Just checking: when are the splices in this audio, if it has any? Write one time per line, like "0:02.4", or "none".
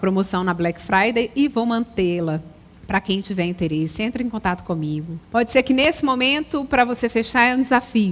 0:02.7
0:05.2

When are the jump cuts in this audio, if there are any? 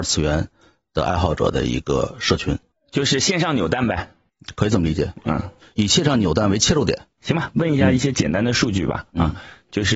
none

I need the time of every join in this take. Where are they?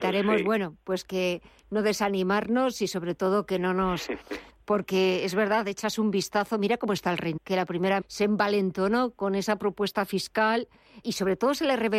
0:04.5
0:07.4
0:08.0
0:11.0

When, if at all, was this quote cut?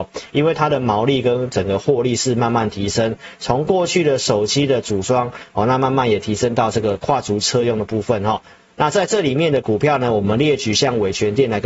none

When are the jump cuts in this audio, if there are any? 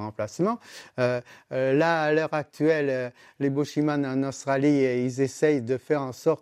none

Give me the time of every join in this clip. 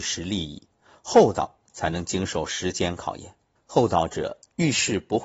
0:03.6

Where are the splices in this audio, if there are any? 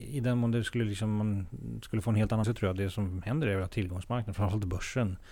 0:02.4

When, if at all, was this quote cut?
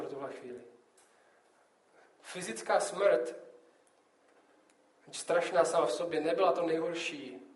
none

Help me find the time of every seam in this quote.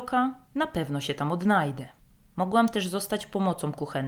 0:02.0

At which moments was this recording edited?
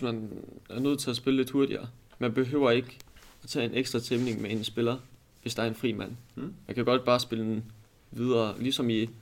none

